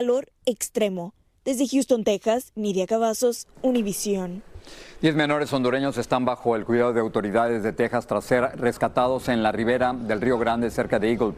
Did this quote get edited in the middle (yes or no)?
no